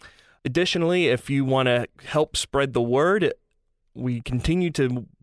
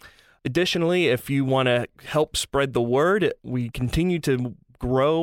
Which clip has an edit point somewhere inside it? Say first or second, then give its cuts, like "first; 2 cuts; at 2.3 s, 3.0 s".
second; 1 cut; at 3.4 s